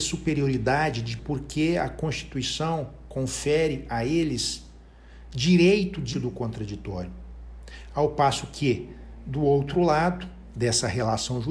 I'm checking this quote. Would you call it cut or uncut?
cut